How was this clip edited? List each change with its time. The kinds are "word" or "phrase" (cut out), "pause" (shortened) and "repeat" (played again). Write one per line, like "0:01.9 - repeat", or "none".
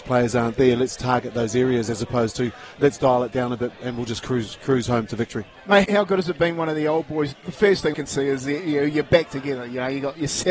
0:02.8 - word
0:05.8 - word
0:07.3 - word
0:07.9 - word